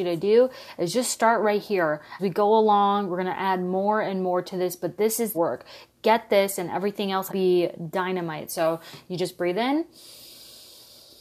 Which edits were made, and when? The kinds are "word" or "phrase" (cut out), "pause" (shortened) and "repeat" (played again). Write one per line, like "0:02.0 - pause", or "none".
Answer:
0:02.2 - word
0:05.3 - phrase
0:07.3 - phrase